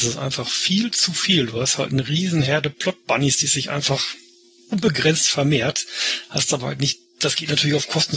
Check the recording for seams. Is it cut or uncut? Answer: uncut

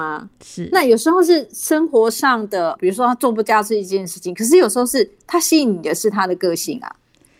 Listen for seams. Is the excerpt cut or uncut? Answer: cut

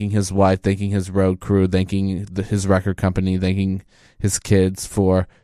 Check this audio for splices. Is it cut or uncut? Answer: uncut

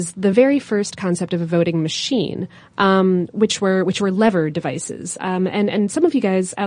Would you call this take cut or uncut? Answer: uncut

